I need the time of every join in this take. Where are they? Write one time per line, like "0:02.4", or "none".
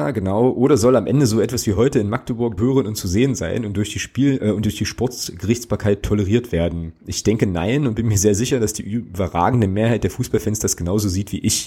0:02.6